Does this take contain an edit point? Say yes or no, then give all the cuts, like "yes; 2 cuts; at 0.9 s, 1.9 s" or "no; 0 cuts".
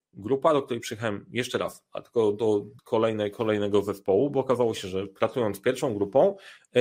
yes; 1 cut; at 2.8 s